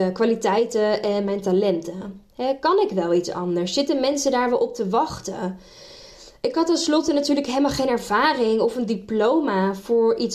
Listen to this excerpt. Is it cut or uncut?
uncut